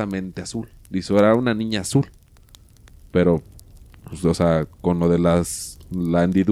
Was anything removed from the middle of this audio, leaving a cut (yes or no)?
no